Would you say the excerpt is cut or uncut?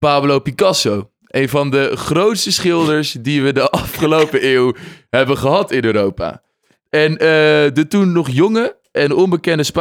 uncut